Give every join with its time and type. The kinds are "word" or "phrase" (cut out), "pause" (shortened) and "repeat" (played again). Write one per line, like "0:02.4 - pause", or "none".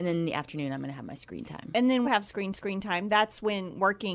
0:02.0 - phrase
0:02.5 - repeat